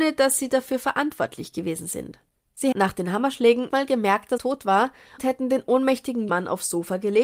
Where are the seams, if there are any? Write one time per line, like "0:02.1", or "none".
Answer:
0:02.7
0:03.7
0:04.4
0:05.2
0:06.3